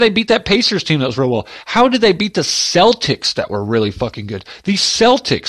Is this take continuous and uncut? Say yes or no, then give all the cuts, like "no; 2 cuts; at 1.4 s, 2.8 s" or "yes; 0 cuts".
yes; 0 cuts